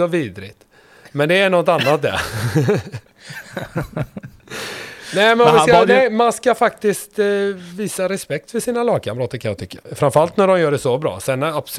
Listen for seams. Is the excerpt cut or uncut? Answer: cut